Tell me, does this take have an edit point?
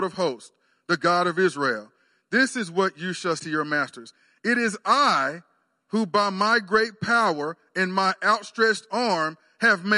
yes; 1 cut; at 3.4 s

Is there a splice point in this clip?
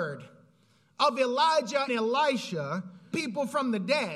yes; 2 cuts; at 1.9 s, 3.1 s

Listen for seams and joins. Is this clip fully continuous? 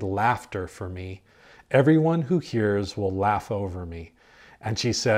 yes; 0 cuts

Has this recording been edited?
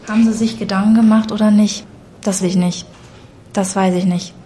yes; 1 cut; at 2.4 s

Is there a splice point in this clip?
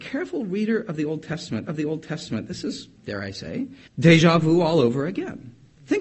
yes; 3 cuts; at 1.7 s, 3.0 s, 3.9 s

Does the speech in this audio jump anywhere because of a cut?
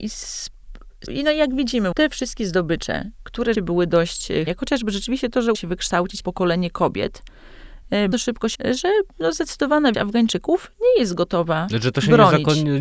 yes; 9 cuts; at 1.1 s, 1.9 s, 3.5 s, 4.5 s, 5.5 s, 6.2 s, 8.1 s, 8.5 s, 9.9 s

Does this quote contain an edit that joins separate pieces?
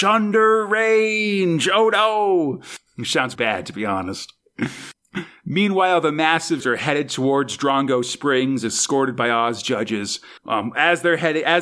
yes; 3 cuts; at 3.4 s, 6.6 s, 10.4 s

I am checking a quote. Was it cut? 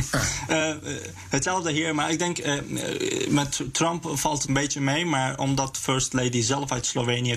yes; 1 cut; at 4.5 s

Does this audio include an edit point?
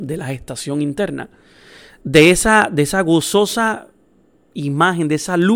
no; 0 cuts

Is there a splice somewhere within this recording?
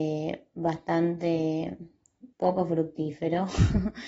yes; 1 cut; at 2.3 s

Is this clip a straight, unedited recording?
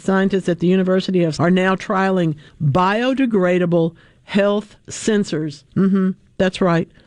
no; 3 cuts; at 1.3 s, 2.5 s, 5.7 s

